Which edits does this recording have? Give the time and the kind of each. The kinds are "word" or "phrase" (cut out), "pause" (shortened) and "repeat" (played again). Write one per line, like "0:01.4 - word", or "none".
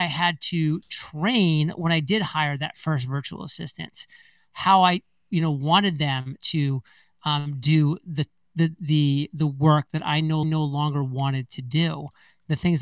0:10.4 - repeat